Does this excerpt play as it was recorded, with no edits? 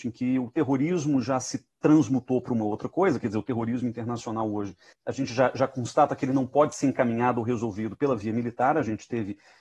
yes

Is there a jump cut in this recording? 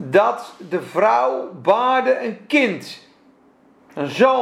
no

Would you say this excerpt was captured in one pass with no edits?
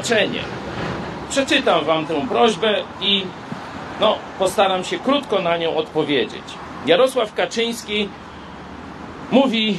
yes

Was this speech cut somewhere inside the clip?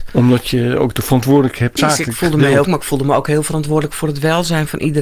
yes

